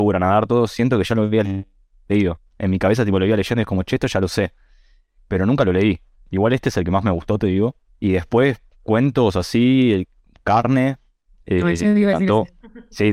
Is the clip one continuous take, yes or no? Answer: yes